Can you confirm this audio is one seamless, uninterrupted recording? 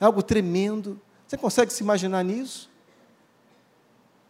yes; 0 cuts

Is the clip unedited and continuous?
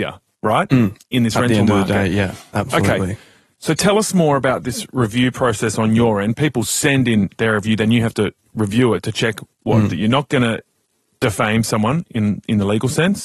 yes; 0 cuts

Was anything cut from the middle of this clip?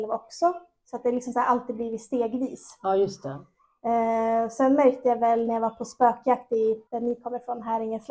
yes; 1 cut; at 6.9 s

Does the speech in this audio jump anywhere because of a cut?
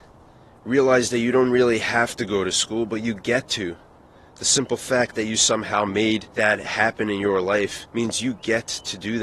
yes; 2 cuts; at 6.3 s, 7.9 s

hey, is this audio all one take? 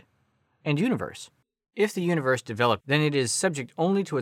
no; 2 cuts; at 1.4 s, 2.8 s

